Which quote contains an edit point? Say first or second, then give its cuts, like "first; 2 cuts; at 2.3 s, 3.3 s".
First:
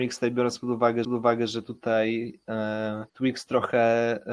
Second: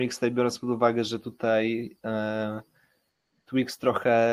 first; 2 cuts; at 1.0 s, 3.1 s